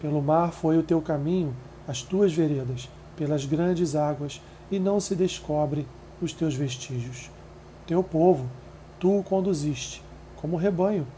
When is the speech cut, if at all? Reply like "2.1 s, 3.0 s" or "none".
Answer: none